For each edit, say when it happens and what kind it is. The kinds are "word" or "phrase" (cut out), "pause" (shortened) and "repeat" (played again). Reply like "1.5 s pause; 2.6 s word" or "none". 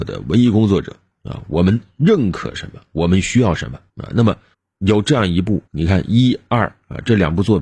3.9 s pause; 4.5 s pause; 5.7 s pause